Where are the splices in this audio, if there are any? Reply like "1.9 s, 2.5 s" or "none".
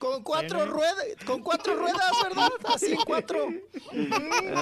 none